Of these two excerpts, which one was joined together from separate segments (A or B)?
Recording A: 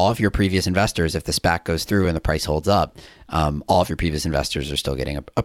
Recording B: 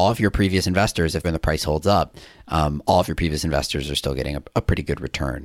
B